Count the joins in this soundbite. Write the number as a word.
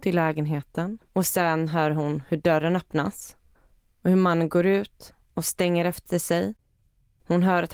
three